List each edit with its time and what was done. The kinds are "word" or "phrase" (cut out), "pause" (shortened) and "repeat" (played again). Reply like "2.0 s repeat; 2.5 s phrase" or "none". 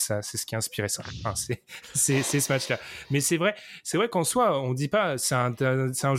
none

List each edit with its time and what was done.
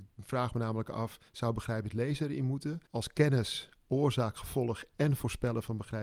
1.3 s pause; 2.9 s pause

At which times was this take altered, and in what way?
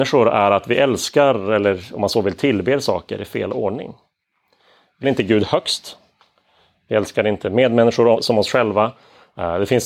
5.0 s word

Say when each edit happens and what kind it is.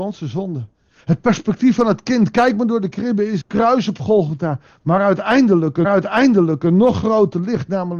3.4 s word; 5.8 s repeat

